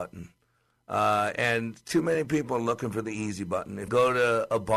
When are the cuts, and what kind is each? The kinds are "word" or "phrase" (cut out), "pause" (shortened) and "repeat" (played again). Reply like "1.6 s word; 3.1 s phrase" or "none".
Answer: 3.9 s phrase